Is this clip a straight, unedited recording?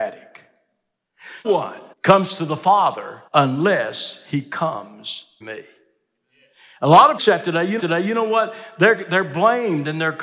no; 6 cuts; at 1.4 s, 1.9 s, 3.3 s, 5.4 s, 7.2 s, 7.8 s

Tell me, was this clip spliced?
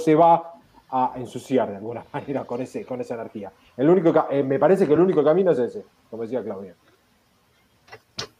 no; 0 cuts

